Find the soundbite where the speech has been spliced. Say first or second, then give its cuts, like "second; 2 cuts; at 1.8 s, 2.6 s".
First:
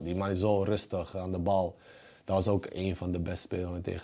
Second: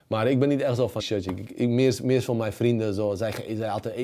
second; 2 cuts; at 1.0 s, 1.5 s